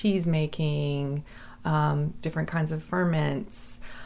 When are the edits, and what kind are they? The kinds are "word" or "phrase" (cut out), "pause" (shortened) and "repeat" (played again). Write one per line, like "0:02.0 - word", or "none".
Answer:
none